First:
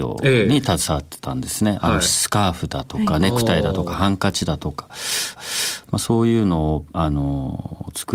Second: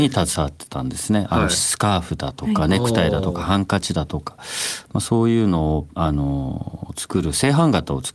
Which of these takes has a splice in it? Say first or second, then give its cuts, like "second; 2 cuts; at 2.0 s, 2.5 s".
first; 1 cut; at 5.3 s